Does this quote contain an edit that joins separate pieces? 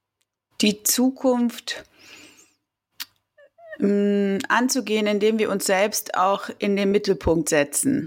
no; 0 cuts

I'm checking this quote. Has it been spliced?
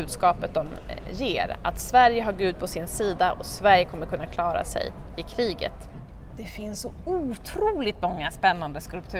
no; 0 cuts

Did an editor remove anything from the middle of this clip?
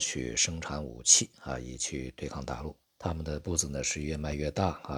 yes; 1 cut; at 2.8 s

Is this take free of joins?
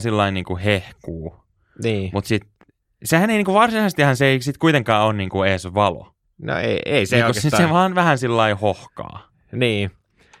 yes; 0 cuts

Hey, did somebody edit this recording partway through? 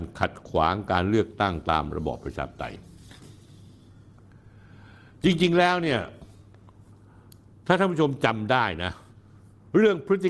no; 0 cuts

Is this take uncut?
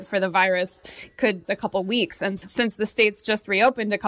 no; 2 cuts; at 1.4 s, 2.4 s

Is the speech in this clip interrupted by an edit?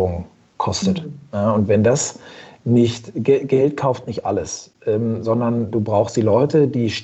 no; 0 cuts

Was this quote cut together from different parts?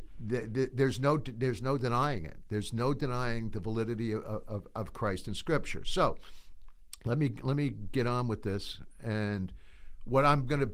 no; 0 cuts

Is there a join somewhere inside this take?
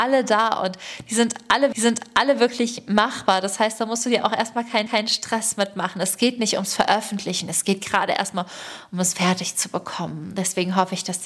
yes; 2 cuts; at 1.7 s, 4.9 s

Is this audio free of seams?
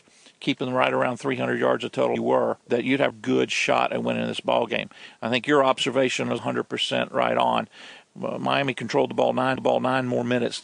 no; 5 cuts; at 2.2 s, 2.6 s, 3.1 s, 6.4 s, 9.6 s

